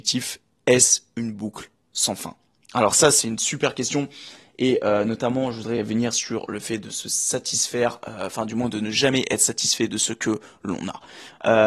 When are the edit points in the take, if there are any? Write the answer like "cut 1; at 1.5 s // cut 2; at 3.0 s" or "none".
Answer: none